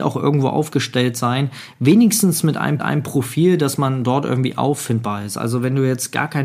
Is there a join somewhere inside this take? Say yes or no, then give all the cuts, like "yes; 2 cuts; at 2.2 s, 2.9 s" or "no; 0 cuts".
yes; 1 cut; at 2.8 s